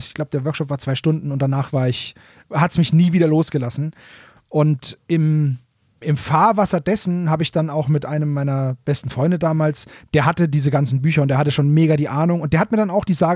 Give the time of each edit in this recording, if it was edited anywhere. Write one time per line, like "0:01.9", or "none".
0:06.0